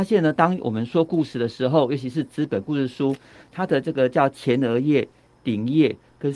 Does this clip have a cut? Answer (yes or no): no